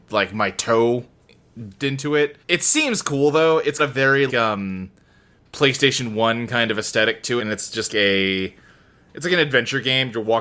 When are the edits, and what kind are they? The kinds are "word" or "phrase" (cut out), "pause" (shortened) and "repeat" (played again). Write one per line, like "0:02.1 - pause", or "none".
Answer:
0:01.8 - word
0:02.4 - pause
0:03.8 - word
0:04.3 - word
0:07.4 - word
0:07.9 - word